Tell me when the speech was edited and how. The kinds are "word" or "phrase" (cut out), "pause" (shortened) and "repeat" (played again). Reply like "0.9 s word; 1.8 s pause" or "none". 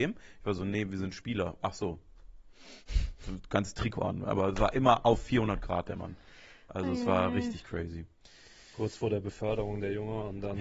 none